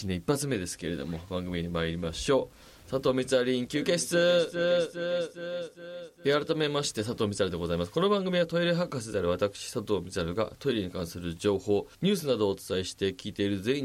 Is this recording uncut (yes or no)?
no